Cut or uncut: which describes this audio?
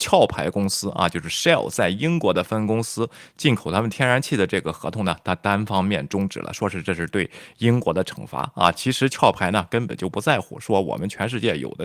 uncut